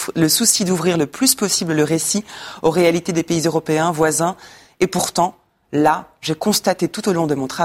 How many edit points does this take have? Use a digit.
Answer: 0